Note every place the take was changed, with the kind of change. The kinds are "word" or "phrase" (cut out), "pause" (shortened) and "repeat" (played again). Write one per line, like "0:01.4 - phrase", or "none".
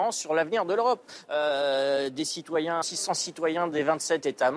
0:02.8 - phrase